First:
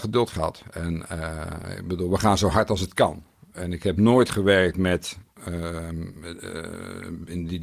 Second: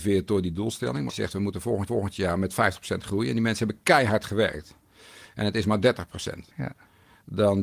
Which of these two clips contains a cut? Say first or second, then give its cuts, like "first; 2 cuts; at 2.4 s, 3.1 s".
second; 3 cuts; at 1.1 s, 1.9 s, 6.5 s